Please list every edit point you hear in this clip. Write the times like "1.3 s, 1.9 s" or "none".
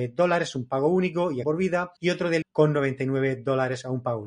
1.4 s, 2.0 s, 2.4 s